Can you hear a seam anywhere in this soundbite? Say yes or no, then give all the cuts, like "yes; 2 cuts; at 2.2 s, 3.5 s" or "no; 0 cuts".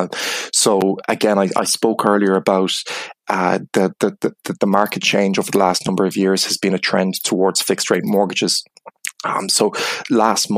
no; 0 cuts